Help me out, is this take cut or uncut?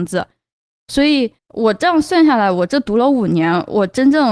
cut